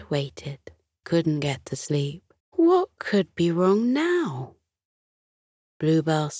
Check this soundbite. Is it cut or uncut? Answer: cut